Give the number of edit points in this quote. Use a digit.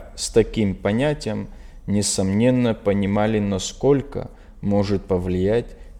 0